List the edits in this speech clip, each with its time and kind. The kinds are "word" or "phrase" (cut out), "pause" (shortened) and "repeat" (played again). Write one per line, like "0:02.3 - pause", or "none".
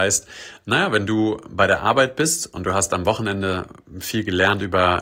none